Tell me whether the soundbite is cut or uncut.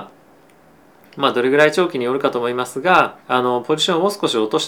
cut